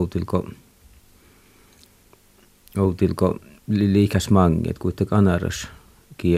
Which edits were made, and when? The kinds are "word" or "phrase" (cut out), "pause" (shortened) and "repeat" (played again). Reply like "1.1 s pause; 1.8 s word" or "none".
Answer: none